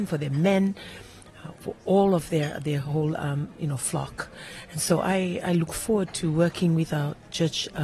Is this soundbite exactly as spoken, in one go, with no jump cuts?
yes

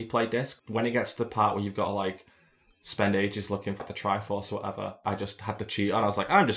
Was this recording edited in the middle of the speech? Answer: no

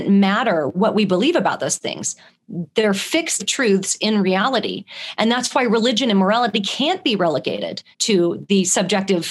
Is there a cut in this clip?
yes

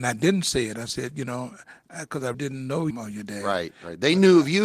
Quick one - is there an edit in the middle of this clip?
yes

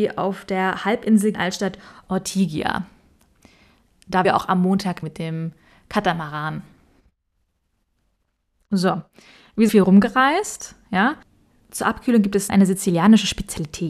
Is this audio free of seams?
no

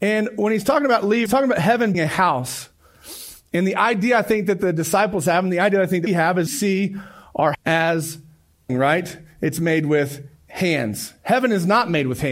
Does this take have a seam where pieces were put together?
yes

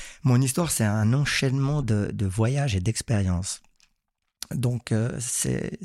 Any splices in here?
no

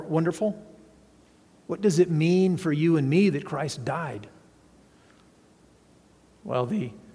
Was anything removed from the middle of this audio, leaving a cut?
no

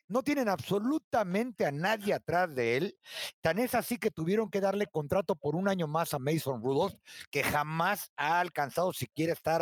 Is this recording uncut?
yes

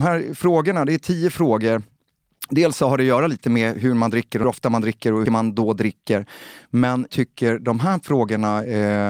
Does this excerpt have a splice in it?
yes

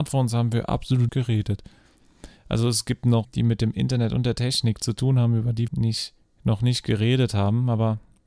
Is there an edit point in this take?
yes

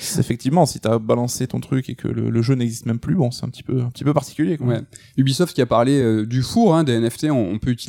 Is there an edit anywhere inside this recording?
no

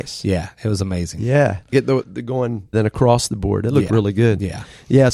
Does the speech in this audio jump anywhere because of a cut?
yes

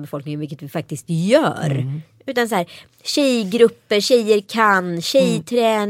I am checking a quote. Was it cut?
no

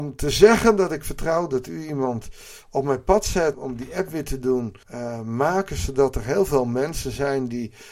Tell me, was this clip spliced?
yes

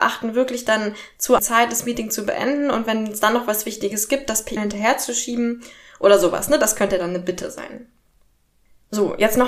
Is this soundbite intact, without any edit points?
no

